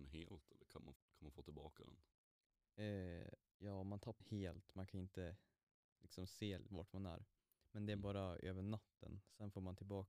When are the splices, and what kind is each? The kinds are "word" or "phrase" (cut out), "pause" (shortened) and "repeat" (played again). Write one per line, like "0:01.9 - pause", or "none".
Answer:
0:01.0 - word
0:04.2 - phrase
0:06.7 - word